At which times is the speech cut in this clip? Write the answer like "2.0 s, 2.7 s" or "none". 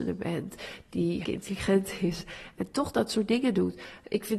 1.2 s